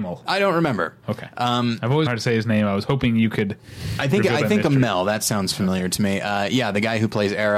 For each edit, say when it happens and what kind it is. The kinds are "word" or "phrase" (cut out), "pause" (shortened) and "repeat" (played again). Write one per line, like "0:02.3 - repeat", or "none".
0:02.1 - phrase